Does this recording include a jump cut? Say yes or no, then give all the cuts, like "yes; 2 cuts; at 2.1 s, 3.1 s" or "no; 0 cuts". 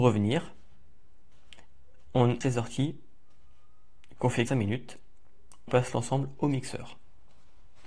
yes; 3 cuts; at 2.4 s, 4.5 s, 5.7 s